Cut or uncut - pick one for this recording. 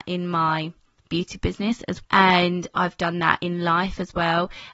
cut